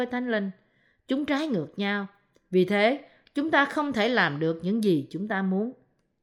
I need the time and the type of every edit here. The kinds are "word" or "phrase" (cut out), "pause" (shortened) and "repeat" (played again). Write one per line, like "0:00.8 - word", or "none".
none

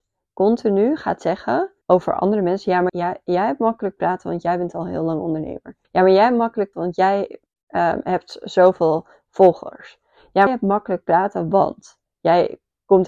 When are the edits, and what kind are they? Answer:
0:01.8 - pause
0:02.9 - word
0:05.8 - pause
0:06.7 - word
0:07.5 - pause
0:10.5 - phrase

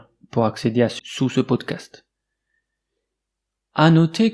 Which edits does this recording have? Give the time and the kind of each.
0:01.0 - word

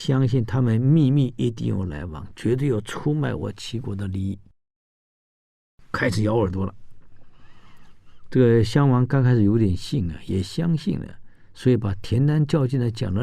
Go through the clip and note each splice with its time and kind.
none

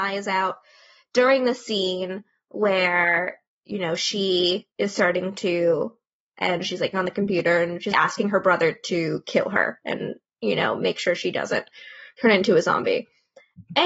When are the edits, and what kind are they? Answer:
0:03.5 - pause
0:04.7 - pause
0:06.3 - phrase
0:06.9 - word
0:07.9 - word

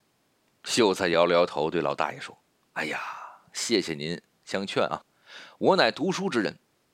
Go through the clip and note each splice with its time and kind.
0:02.5 - pause

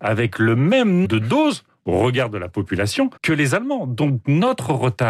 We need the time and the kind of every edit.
0:01.0 - word
0:01.7 - pause
0:03.2 - pause

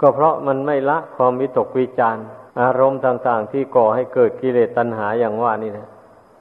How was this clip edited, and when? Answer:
0:02.5 - pause

